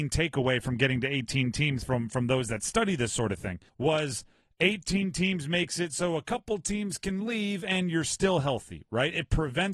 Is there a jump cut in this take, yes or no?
yes